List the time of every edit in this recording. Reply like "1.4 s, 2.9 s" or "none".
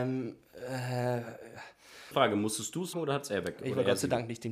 2.1 s, 2.9 s